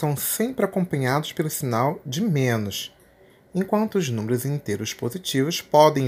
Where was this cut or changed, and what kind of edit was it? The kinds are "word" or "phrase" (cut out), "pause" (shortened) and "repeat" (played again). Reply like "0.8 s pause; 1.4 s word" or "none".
none